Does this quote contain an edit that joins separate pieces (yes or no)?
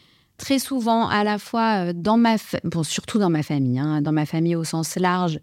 no